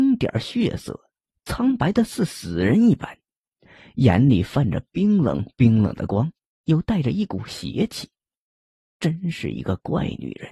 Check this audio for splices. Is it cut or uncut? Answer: uncut